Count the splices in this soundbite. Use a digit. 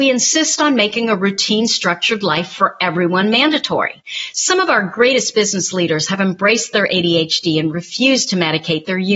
0